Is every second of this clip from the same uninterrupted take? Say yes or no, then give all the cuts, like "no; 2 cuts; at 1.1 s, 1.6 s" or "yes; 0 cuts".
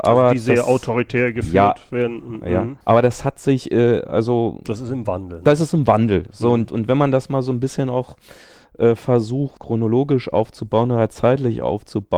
no; 1 cut; at 2.8 s